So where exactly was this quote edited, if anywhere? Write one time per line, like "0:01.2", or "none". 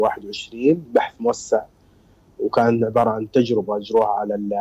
none